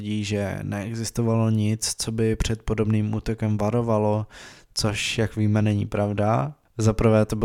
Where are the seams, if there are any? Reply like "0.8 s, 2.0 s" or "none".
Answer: none

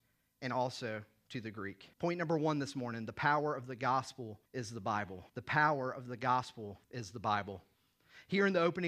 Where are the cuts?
1.9 s, 4.5 s, 5.3 s, 6.8 s

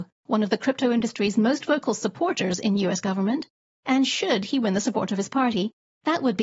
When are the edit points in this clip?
none

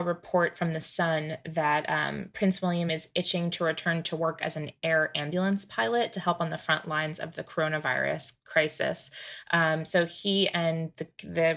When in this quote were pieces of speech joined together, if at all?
none

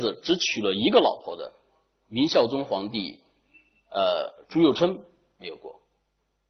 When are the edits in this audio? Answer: none

